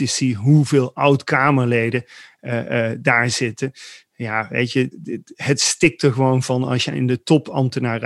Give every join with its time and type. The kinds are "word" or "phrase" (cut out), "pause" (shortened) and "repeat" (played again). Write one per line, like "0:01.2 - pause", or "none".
0:04.9 - word